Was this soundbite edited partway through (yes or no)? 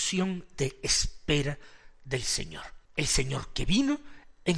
yes